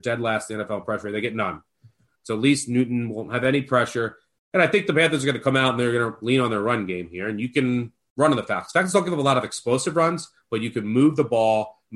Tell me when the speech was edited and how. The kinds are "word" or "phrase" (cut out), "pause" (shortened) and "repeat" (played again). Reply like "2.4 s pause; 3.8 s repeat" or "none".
none